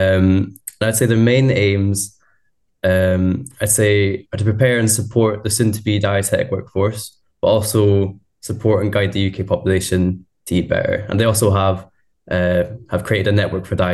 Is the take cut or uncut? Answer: uncut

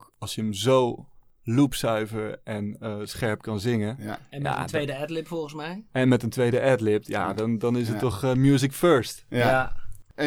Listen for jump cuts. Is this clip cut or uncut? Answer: uncut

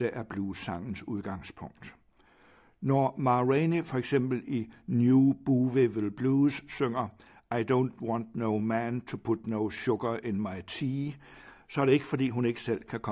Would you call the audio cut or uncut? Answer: uncut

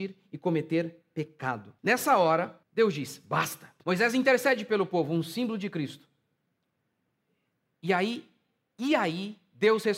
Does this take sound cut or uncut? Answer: cut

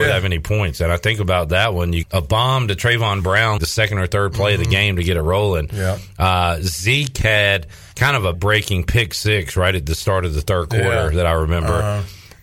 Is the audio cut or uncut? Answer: cut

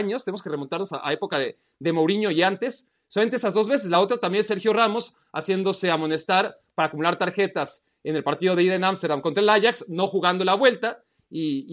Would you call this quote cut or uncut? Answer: uncut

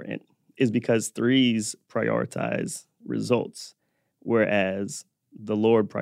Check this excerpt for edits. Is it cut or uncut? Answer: uncut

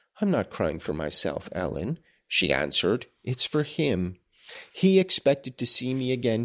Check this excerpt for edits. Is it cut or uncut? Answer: uncut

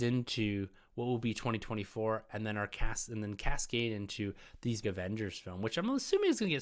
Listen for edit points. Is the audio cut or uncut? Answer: cut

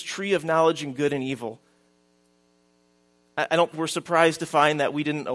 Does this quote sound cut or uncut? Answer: cut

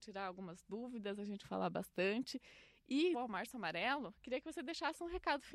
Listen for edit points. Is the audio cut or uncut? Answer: cut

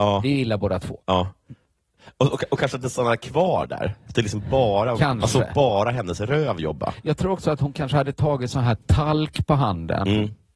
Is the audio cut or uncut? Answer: uncut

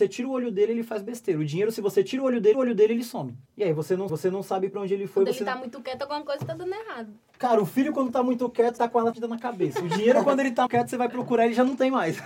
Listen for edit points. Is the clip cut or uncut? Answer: cut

